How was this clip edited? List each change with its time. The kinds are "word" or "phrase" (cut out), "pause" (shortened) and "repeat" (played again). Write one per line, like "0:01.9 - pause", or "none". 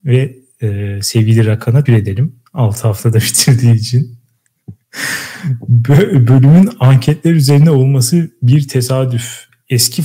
0:01.9 - word